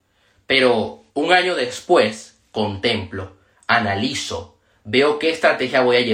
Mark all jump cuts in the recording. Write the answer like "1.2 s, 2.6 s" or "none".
1.1 s

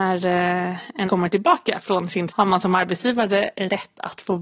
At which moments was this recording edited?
1.1 s, 2.3 s

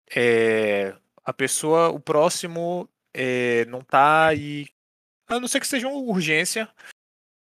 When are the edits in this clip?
none

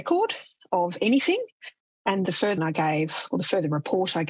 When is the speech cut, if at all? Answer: 2.3 s, 2.6 s

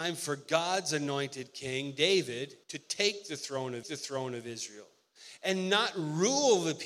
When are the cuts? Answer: 2.6 s, 3.8 s

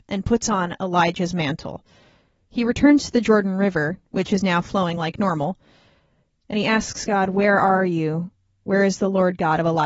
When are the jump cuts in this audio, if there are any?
none

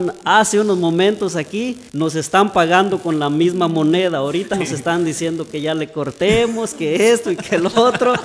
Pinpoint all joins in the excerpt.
1.9 s, 4.5 s

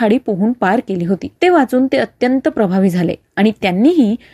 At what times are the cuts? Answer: 1.4 s

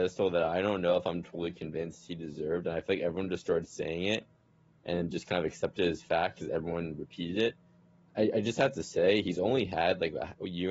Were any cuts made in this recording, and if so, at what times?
none

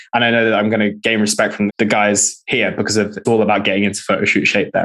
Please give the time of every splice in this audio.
1.7 s, 3.2 s

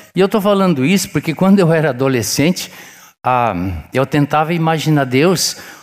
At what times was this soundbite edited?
none

